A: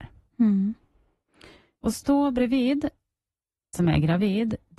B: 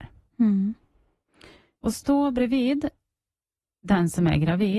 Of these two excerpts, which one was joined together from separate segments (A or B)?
A